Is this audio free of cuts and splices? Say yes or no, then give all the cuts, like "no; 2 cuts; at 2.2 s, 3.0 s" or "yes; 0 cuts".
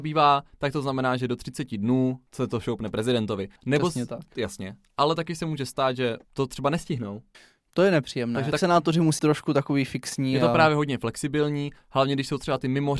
no; 6 cuts; at 2.3 s, 3.6 s, 6.2 s, 7.3 s, 8.5 s, 9.2 s